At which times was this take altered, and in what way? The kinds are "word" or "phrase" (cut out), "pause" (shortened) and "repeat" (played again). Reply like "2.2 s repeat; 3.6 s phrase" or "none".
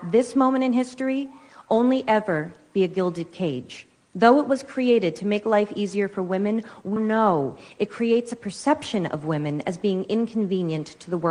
4.0 s pause; 7.0 s word